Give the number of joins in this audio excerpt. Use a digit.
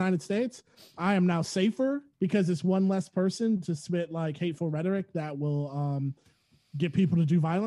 1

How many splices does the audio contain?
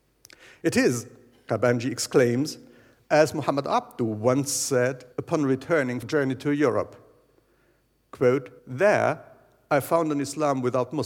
3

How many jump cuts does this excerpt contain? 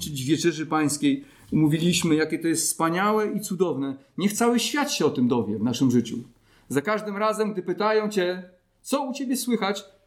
0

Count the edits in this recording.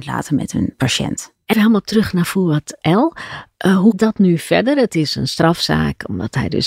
2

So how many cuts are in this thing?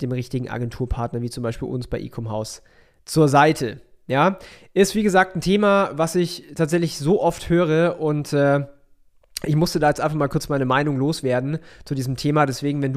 0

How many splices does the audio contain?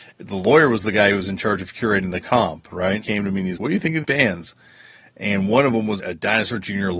4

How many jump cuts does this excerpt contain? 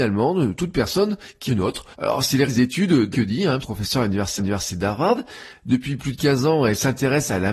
6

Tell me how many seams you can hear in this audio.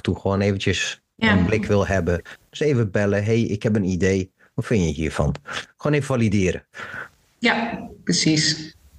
0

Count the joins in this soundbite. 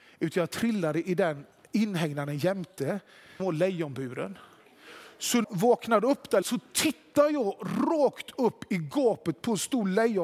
3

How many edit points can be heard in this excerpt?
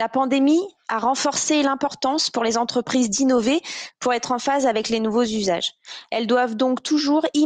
0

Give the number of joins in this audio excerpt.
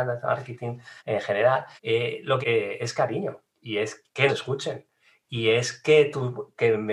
5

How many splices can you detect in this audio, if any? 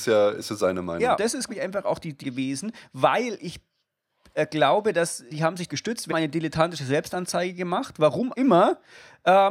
7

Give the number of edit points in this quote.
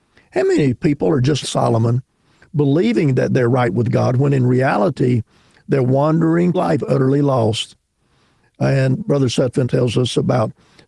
4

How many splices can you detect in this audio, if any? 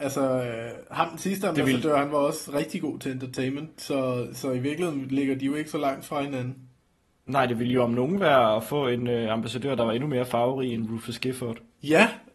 0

